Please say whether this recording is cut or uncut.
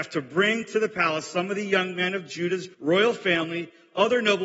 cut